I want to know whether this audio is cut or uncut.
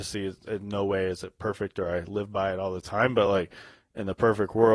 uncut